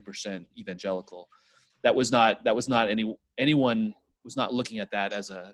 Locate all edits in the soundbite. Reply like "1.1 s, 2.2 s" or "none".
none